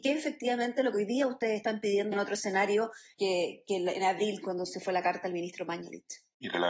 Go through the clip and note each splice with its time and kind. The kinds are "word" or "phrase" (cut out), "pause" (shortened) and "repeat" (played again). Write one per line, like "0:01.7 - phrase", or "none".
0:02.1 - word
0:03.1 - pause